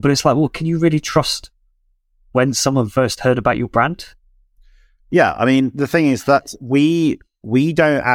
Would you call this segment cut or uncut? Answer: uncut